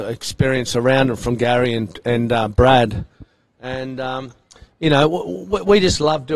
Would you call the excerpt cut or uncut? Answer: uncut